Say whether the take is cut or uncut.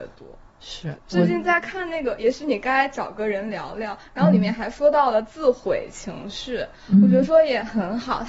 cut